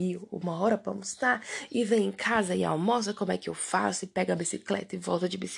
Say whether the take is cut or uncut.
uncut